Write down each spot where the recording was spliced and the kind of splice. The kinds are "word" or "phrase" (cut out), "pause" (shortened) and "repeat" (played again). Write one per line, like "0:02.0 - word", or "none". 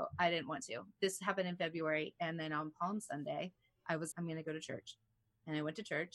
0:04.1 - word